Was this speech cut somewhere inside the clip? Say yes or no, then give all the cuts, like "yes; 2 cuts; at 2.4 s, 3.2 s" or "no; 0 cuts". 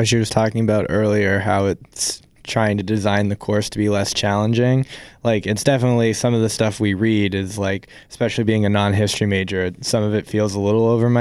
no; 0 cuts